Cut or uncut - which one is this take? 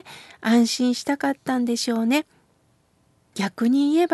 uncut